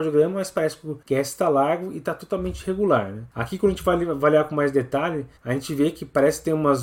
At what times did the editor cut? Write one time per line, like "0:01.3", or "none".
0:01.0
0:03.3
0:05.4